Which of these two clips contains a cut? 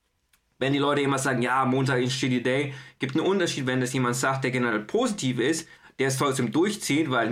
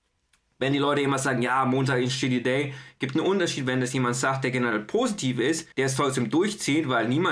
second; 1 cut; at 5.7 s

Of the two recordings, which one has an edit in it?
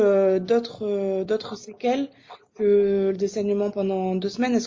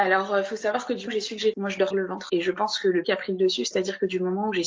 second; 5 cuts; at 1.1 s, 1.5 s, 1.9 s, 2.3 s, 3.0 s

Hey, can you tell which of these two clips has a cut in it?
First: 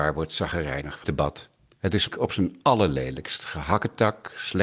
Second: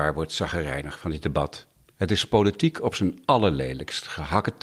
first; 2 cuts; at 1.0 s, 2.1 s

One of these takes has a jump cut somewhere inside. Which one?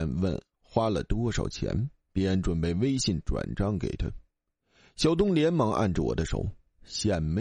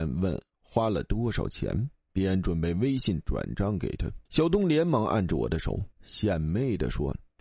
second; 2 cuts; at 4.3 s, 5.9 s

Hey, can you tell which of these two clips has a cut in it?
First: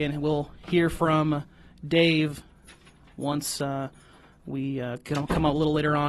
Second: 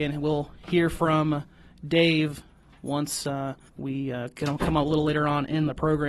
second; 2 cuts; at 2.6 s, 3.7 s

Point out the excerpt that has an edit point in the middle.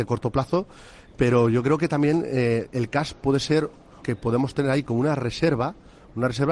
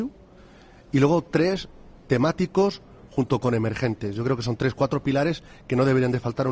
first; 1 cut; at 4.0 s

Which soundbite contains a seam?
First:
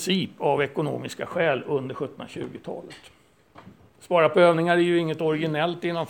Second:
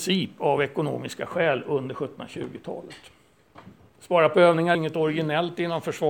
second; 1 cut; at 4.7 s

